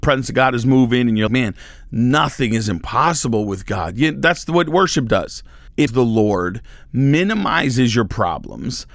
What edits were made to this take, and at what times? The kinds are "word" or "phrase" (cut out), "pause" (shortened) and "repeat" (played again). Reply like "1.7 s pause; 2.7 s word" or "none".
1.3 s word; 5.9 s word